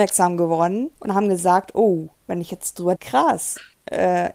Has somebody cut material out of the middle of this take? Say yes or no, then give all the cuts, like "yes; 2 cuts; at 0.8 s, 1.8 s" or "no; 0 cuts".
yes; 3 cuts; at 0.9 s, 2.1 s, 2.9 s